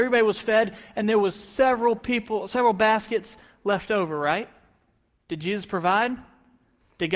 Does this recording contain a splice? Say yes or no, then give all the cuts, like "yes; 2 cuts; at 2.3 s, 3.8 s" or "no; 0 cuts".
no; 0 cuts